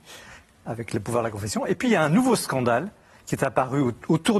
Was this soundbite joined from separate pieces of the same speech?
no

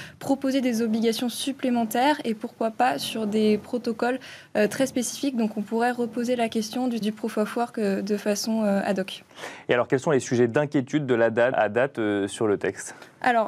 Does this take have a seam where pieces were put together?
yes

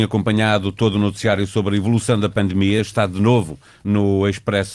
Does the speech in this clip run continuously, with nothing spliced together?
yes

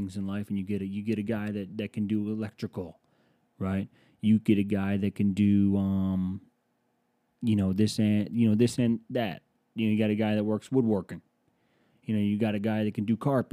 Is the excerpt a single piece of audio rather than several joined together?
yes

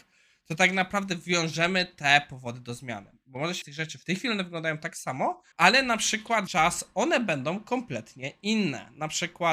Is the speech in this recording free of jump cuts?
no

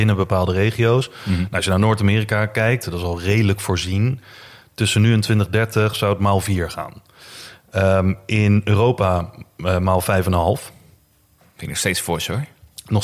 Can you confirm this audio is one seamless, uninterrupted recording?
yes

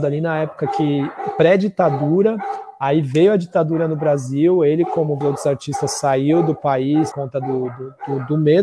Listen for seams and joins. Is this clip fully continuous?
no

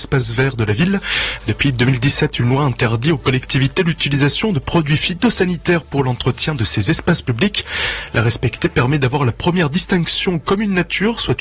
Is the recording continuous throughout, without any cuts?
yes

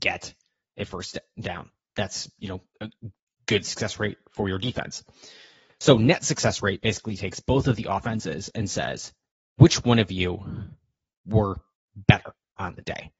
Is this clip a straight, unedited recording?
yes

